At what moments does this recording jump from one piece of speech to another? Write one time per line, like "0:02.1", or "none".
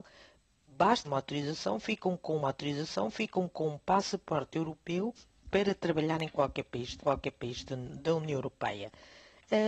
0:01.0
0:02.4
0:05.5
0:07.0